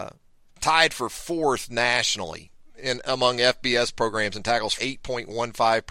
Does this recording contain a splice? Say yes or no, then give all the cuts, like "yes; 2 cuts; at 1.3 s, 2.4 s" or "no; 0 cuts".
yes; 1 cut; at 4.8 s